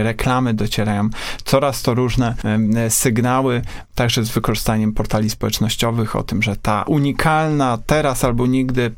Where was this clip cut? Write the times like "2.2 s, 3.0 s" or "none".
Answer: 6.8 s